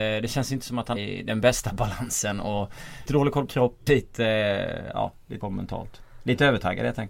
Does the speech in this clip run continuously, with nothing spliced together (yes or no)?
no